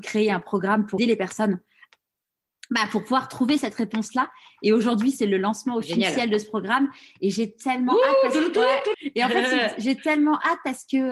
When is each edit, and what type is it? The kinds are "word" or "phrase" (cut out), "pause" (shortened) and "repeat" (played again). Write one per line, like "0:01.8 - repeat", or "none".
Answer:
0:01.0 - word
0:08.9 - word